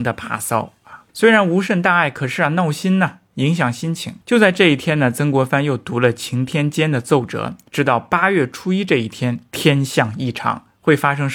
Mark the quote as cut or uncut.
cut